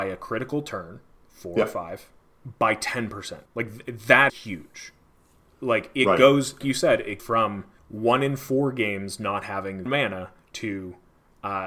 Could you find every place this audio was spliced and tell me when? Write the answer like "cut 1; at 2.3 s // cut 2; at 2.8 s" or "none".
cut 1; at 1.1 s // cut 2; at 3.5 s // cut 3; at 4.3 s // cut 4; at 6.6 s // cut 5; at 7.2 s // cut 6; at 9.9 s